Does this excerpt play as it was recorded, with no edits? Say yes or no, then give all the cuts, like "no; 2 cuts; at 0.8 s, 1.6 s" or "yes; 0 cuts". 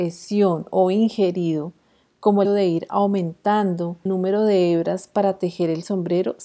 no; 2 cuts; at 2.4 s, 4.1 s